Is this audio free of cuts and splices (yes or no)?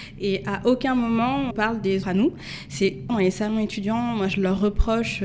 no